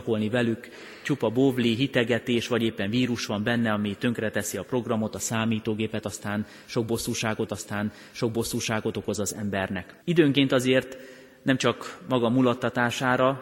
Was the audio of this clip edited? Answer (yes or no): yes